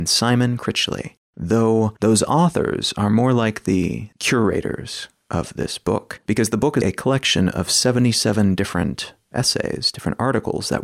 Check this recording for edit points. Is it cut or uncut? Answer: cut